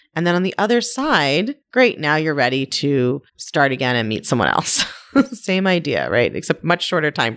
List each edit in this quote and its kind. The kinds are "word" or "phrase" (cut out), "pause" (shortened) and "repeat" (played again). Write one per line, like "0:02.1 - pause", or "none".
0:01.6 - pause
0:03.3 - pause